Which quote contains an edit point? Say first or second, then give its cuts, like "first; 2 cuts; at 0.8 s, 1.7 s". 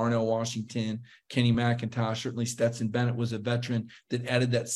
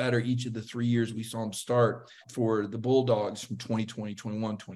second; 1 cut; at 2.2 s